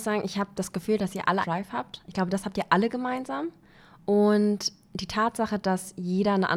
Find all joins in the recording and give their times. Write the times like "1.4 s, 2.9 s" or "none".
1.4 s